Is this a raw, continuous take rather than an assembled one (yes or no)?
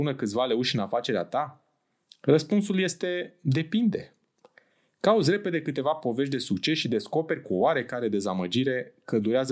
yes